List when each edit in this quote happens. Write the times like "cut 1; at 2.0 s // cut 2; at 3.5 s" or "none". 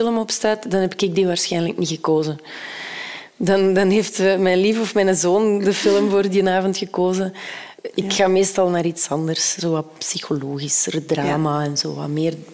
cut 1; at 7.8 s